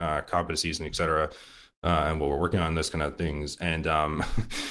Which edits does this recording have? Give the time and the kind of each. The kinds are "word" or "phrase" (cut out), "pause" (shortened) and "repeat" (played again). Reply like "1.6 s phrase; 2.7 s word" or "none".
none